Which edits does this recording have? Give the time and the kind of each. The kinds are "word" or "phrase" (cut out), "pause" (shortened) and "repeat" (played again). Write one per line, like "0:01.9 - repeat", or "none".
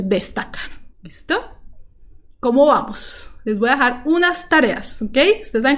0:00.9 - pause

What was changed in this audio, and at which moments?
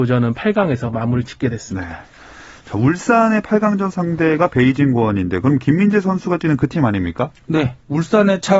none

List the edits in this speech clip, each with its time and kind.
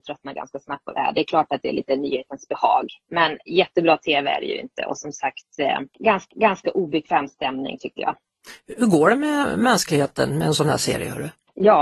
0:06.3 - repeat

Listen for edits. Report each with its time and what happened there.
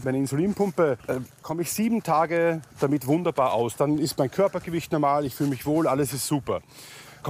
0:01.3 - word

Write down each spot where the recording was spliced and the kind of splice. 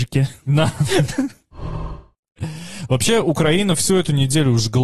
none

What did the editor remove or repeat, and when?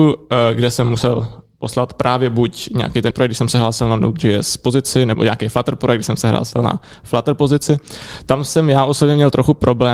0:03.1 - word

